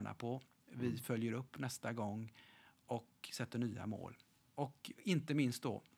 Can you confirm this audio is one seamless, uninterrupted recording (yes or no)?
yes